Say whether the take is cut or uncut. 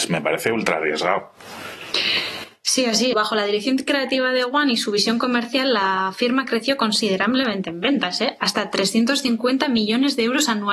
cut